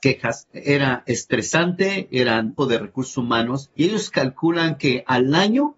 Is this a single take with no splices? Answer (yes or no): no